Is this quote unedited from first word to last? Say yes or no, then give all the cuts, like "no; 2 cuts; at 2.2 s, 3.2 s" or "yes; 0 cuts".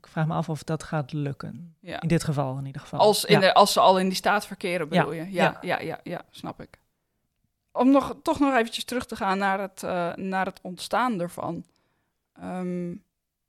yes; 0 cuts